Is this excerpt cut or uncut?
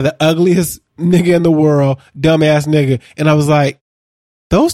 uncut